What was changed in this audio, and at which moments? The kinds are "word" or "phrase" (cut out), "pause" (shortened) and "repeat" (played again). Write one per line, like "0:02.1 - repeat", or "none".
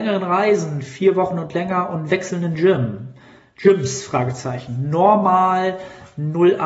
none